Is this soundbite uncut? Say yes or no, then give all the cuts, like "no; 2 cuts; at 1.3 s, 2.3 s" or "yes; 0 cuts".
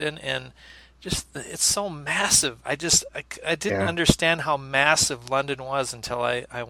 yes; 0 cuts